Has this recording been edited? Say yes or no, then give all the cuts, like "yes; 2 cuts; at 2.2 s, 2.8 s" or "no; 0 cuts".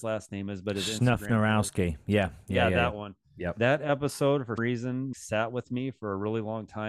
yes; 2 cuts; at 4.6 s, 5.1 s